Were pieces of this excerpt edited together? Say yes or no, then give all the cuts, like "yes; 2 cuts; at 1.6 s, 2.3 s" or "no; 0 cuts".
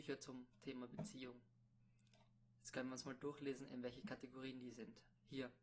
no; 0 cuts